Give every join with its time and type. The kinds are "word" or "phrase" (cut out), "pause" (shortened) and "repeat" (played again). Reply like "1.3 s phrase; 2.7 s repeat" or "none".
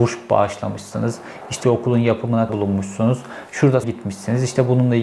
1.6 s word; 2.5 s word; 3.8 s word